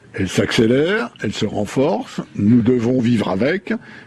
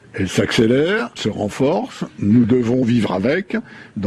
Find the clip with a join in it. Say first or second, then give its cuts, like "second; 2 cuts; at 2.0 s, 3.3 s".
second; 1 cut; at 1.2 s